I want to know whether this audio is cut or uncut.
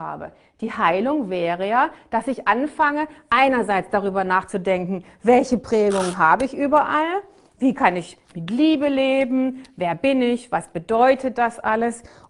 uncut